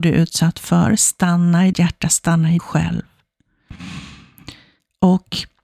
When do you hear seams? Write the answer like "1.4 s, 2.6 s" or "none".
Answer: 1.7 s, 2.6 s